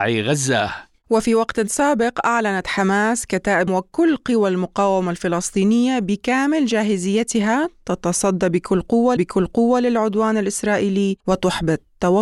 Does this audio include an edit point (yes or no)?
yes